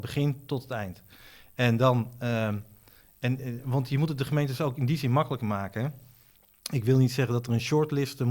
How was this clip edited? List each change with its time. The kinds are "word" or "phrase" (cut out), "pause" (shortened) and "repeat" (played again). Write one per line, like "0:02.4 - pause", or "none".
none